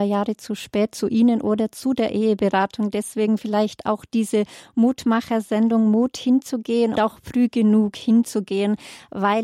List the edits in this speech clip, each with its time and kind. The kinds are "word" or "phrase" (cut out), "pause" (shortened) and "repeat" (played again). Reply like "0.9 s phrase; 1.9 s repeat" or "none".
7.0 s word